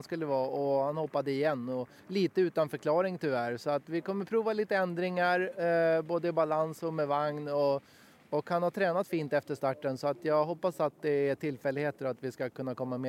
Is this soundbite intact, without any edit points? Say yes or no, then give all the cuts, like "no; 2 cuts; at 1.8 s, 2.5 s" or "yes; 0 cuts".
no; 1 cut; at 2.0 s